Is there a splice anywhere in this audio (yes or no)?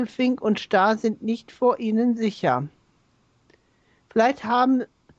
no